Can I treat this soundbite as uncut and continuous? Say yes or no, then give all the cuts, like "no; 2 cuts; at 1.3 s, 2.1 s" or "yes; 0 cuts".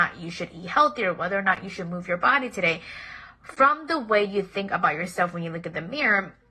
yes; 0 cuts